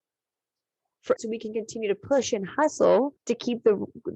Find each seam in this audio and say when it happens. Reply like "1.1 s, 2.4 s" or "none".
1.2 s, 3.2 s